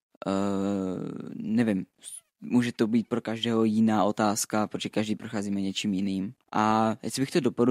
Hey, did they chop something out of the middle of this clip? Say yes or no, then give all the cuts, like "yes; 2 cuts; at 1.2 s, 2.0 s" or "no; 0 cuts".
yes; 1 cut; at 6.4 s